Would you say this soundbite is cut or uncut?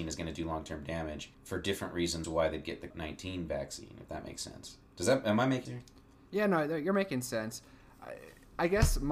cut